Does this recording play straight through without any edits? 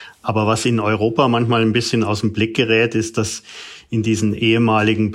yes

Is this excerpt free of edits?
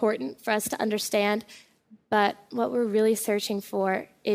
yes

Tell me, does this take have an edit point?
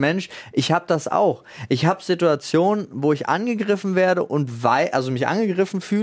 no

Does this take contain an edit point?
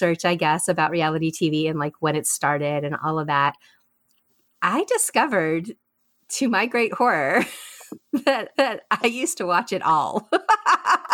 yes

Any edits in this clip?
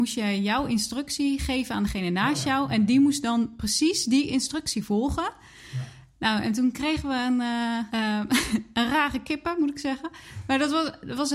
yes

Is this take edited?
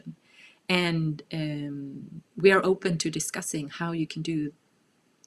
yes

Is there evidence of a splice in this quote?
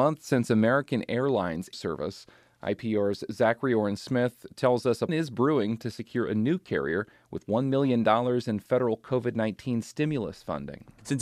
yes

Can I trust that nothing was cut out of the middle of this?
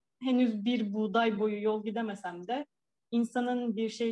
yes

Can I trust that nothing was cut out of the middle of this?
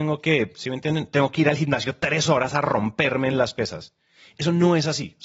yes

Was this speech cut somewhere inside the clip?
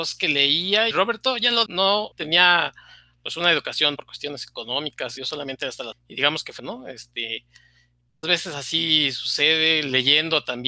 yes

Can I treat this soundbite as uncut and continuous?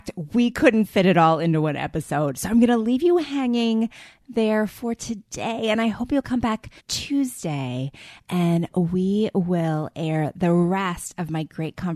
no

